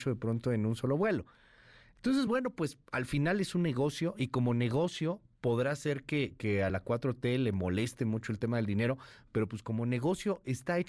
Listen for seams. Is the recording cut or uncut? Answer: uncut